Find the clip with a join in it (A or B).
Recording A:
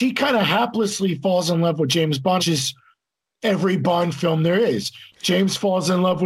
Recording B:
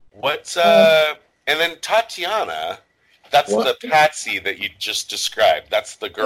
A